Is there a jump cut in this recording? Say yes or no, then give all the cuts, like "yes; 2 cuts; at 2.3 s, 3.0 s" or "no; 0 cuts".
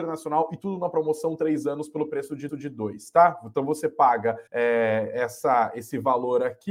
yes; 2 cuts; at 2.5 s, 4.5 s